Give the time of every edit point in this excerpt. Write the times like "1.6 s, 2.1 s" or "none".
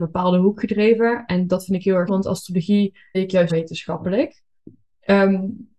2.1 s, 3.1 s, 3.5 s